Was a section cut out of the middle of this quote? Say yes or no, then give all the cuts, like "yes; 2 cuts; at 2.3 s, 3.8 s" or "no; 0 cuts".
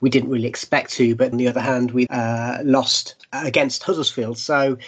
yes; 2 cuts; at 1.3 s, 2.1 s